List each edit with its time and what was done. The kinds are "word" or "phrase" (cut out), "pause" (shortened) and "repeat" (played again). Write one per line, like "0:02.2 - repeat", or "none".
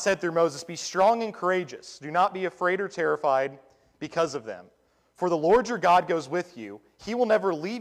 none